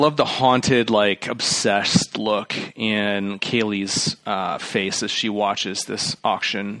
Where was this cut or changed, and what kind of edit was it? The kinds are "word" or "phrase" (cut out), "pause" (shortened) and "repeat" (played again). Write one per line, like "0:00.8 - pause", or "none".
none